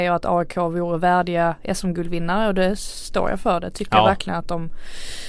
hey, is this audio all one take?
yes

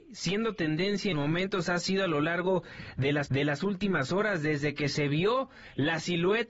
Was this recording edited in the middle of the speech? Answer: yes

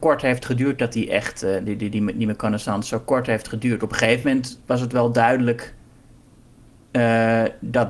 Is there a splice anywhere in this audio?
no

